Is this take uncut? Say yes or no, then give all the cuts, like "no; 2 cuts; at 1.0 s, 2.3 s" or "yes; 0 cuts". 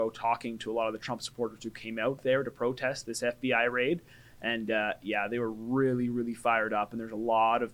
yes; 0 cuts